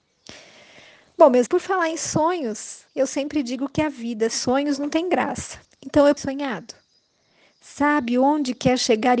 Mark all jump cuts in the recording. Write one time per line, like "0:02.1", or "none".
0:01.5
0:02.9
0:04.3
0:05.6
0:06.2